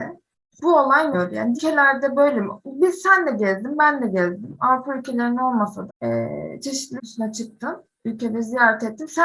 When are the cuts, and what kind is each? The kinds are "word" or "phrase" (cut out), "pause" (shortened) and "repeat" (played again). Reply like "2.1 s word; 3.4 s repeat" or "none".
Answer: 1.1 s word; 1.5 s word; 5.9 s word; 7.0 s word